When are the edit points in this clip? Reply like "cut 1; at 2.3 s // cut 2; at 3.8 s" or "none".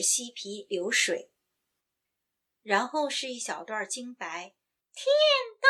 none